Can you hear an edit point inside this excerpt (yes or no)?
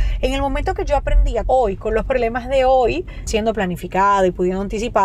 yes